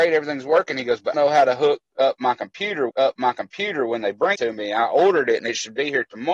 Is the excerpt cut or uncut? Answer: cut